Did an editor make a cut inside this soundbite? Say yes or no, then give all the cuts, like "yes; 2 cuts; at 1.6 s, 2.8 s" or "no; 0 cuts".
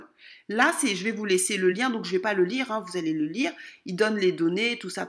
no; 0 cuts